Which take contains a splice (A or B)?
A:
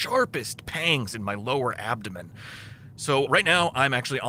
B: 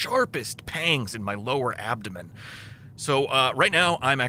A